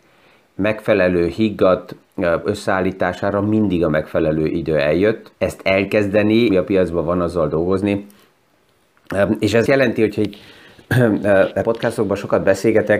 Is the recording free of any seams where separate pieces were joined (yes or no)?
no